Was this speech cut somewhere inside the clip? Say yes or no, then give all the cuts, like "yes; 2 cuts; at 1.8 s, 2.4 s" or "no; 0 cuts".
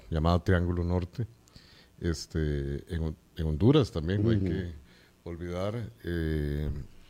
no; 0 cuts